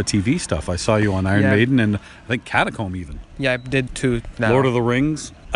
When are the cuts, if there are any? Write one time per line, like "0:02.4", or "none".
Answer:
0:03.9